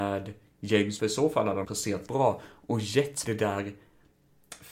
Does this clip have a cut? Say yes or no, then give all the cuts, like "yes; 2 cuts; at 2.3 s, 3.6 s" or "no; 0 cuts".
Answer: yes; 4 cuts; at 1.0 s, 1.6 s, 2.1 s, 3.2 s